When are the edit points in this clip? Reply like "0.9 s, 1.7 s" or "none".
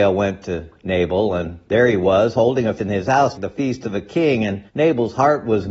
2.8 s, 3.3 s, 4.7 s